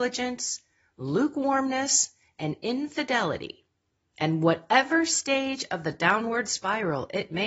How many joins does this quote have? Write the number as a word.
zero